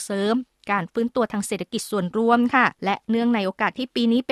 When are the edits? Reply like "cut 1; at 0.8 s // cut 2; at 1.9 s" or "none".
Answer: cut 1; at 2.7 s